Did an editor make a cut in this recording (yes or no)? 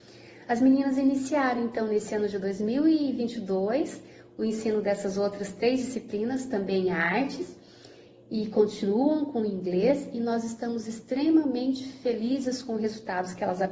no